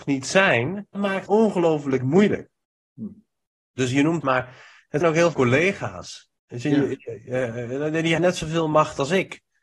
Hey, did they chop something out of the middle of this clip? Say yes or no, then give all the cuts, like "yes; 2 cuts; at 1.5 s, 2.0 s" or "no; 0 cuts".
yes; 6 cuts; at 0.9 s, 1.3 s, 4.2 s, 5.0 s, 5.3 s, 8.2 s